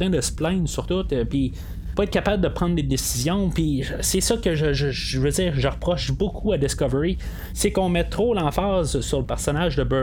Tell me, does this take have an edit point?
no; 0 cuts

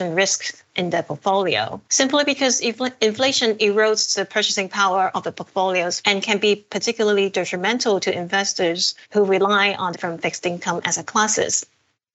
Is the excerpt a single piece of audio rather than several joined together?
no; 4 cuts; at 1.8 s, 6.0 s, 9.0 s, 9.9 s

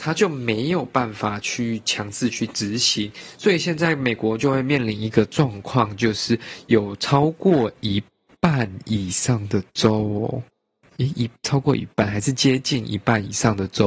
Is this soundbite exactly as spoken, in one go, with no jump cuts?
yes; 0 cuts

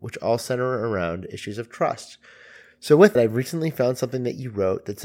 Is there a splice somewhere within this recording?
yes; 1 cut; at 3.1 s

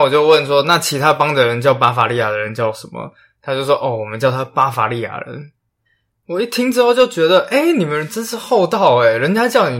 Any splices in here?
no; 0 cuts

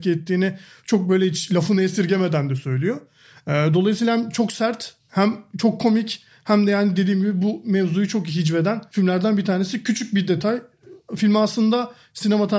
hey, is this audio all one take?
yes; 0 cuts

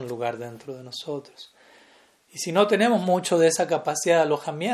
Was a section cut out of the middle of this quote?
no; 0 cuts

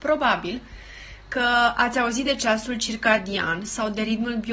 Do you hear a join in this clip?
no; 0 cuts

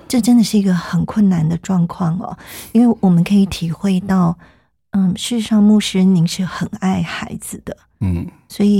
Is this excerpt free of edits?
yes; 0 cuts

